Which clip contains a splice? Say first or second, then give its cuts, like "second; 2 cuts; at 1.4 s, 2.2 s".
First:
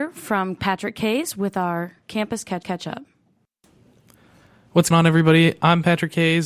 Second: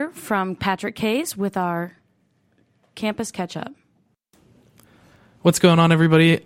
first; 3 cuts; at 2.0 s, 2.6 s, 4.9 s